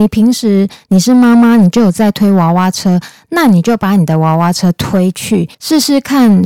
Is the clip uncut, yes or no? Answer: no